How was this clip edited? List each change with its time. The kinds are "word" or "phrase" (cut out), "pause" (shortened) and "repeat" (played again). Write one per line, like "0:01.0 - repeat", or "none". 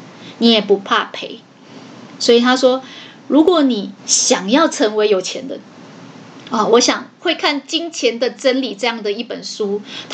0:04.0 - pause